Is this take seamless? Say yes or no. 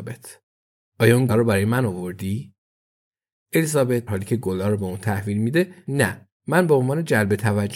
no